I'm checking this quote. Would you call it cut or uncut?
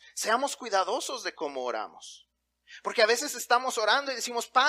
uncut